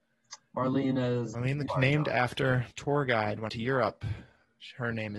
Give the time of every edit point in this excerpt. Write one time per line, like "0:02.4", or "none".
0:01.3
0:01.7
0:02.7
0:03.5